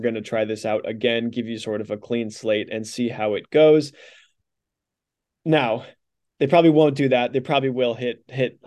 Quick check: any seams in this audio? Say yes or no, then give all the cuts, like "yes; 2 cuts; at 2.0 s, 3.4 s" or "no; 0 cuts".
no; 0 cuts